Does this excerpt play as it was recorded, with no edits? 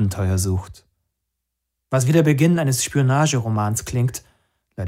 yes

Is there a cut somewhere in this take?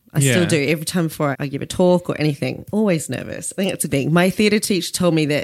yes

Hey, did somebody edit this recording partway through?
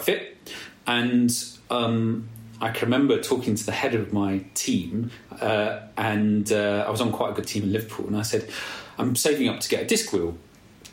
no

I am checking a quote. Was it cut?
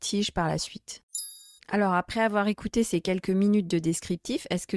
yes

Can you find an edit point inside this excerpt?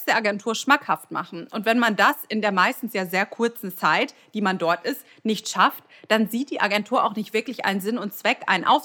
no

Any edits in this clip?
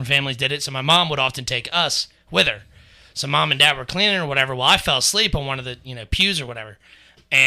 no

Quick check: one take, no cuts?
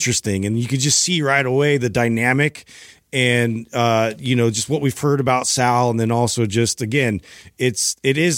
yes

